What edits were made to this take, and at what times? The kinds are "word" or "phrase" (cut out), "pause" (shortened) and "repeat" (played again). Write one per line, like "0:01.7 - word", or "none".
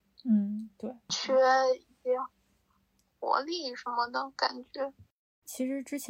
none